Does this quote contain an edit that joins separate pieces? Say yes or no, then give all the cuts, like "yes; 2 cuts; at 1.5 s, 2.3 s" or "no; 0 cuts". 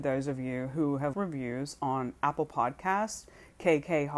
yes; 1 cut; at 1.1 s